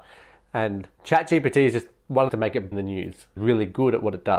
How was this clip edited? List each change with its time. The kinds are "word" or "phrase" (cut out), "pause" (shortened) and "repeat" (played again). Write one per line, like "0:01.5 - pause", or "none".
0:01.0 - pause
0:02.3 - phrase
0:02.7 - phrase
0:03.4 - phrase